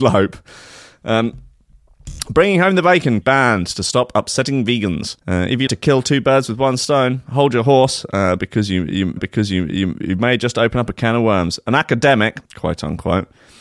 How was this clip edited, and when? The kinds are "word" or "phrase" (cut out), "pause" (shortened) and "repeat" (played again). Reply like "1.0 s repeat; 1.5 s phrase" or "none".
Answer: 3.2 s phrase; 5.2 s pause; 5.7 s word; 9.2 s repeat; 12.4 s pause